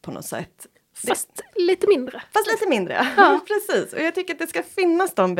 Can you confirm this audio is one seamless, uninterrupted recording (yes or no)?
yes